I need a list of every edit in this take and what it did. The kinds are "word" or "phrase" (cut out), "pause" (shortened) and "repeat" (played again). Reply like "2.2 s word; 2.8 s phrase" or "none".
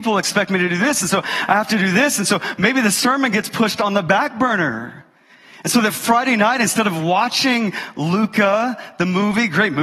none